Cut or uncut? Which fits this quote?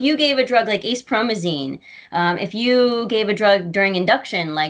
uncut